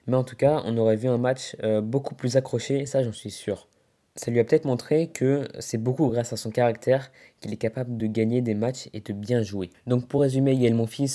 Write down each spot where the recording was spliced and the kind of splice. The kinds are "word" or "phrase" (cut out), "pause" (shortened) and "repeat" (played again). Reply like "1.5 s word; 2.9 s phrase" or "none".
none